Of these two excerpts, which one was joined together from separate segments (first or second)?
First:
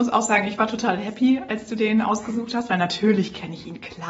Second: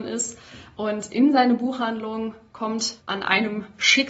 second